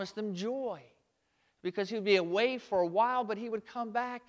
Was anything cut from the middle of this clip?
no; 0 cuts

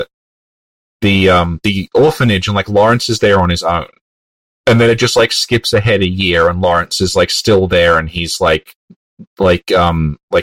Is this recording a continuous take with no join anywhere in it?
yes; 0 cuts

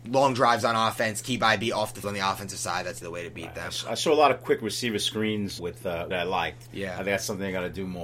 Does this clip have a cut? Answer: yes; 4 cuts; at 2.0 s, 3.0 s, 5.6 s, 6.1 s

